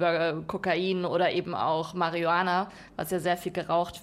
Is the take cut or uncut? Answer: uncut